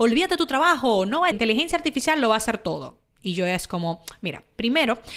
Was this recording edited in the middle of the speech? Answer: yes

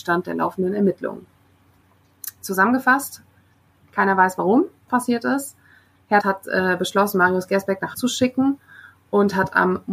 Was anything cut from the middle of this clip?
yes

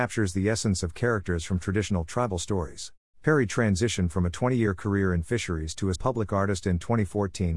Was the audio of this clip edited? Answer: yes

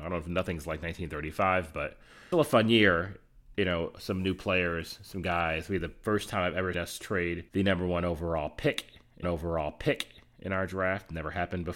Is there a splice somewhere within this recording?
yes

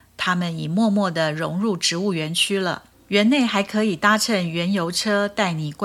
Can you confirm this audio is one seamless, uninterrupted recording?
no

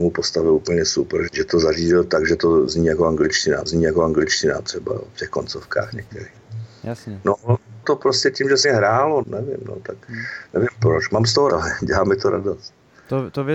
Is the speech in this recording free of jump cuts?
no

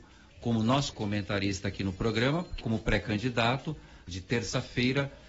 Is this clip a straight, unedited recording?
no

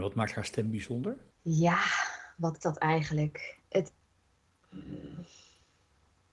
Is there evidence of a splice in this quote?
yes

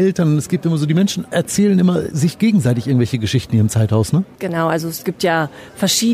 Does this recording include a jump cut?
no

